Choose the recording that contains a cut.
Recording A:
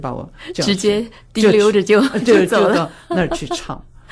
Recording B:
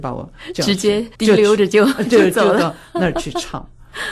B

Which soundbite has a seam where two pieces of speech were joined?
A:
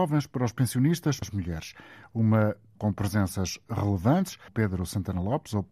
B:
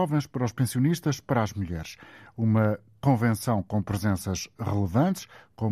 A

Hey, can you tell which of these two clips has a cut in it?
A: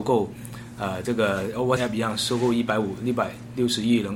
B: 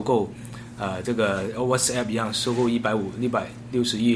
A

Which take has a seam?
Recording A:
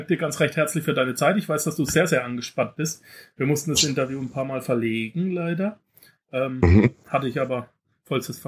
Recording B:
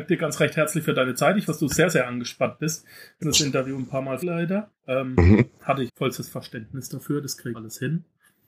B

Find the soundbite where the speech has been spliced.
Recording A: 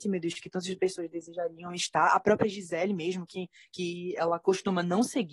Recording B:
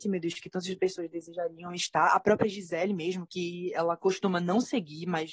B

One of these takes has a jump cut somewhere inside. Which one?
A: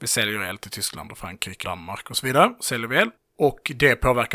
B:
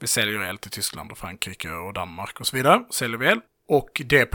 A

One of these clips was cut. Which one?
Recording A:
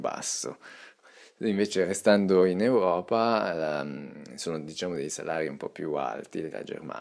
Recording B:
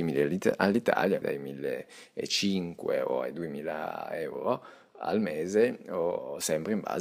B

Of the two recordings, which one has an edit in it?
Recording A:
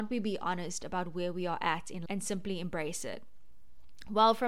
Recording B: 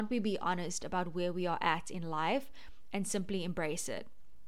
A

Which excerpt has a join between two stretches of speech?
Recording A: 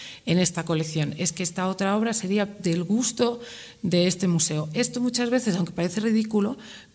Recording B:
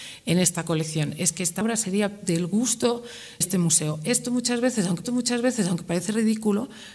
B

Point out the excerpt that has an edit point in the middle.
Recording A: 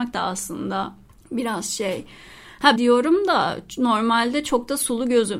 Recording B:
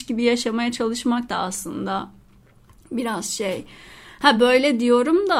A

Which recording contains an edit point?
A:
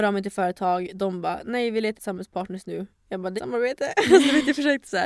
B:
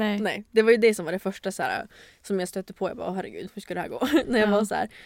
A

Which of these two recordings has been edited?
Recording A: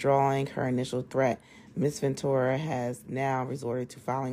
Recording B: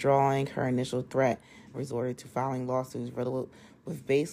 B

